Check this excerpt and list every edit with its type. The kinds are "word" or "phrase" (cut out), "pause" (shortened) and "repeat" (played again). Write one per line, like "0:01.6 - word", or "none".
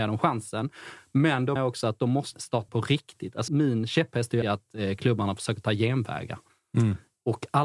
0:01.6 - word
0:02.3 - word
0:02.7 - word
0:03.5 - word
0:04.4 - word